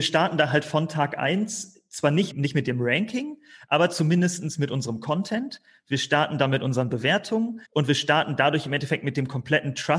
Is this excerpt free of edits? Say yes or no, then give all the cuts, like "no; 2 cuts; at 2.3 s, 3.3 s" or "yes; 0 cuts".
no; 2 cuts; at 2.3 s, 7.6 s